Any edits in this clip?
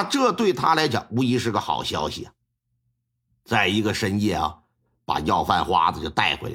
no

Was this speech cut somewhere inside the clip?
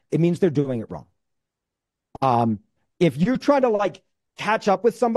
no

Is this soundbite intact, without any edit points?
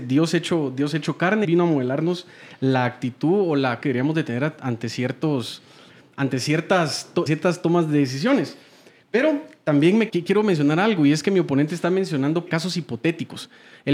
no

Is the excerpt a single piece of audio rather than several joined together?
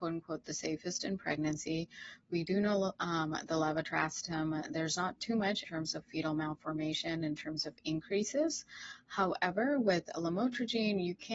no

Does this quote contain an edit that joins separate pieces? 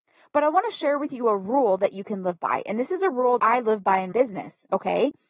yes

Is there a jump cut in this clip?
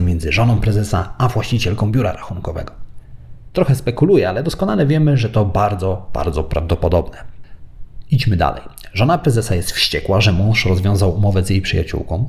no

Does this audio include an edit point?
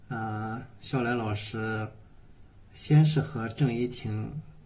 yes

